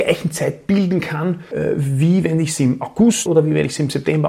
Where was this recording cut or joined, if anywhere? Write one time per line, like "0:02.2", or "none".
0:03.3